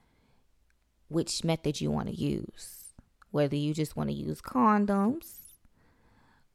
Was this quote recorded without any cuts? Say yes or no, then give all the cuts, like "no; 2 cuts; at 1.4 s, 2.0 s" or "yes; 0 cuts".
yes; 0 cuts